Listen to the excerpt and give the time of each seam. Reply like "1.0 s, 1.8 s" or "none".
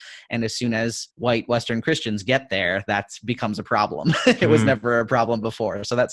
1.1 s